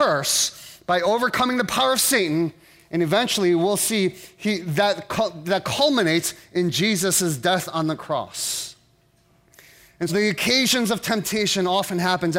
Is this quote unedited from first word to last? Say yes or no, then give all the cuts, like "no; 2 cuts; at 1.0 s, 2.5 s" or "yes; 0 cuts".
no; 1 cut; at 10.1 s